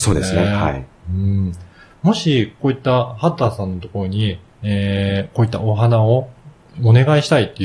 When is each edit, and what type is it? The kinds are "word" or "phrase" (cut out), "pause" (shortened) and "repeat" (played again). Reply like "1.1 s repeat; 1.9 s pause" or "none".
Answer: none